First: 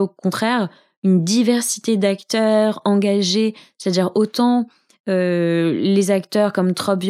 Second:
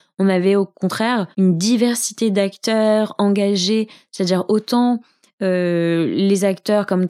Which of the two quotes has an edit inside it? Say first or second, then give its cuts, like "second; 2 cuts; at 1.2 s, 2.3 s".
second; 1 cut; at 1.3 s